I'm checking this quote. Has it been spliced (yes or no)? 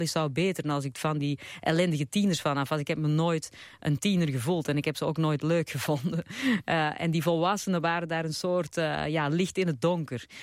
no